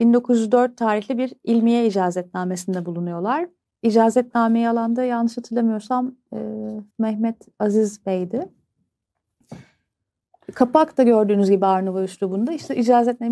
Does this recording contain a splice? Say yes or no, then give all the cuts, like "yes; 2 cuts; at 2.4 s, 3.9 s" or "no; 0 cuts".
yes; 1 cut; at 6.9 s